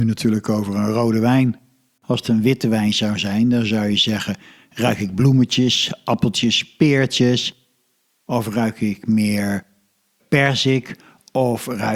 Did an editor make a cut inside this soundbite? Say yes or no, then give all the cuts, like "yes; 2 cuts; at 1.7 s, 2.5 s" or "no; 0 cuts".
no; 0 cuts